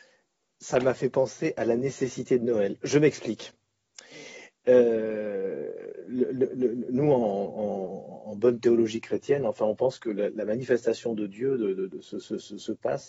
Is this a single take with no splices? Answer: yes; 0 cuts

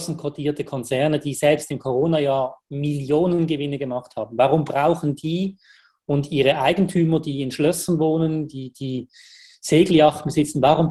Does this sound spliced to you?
no; 0 cuts

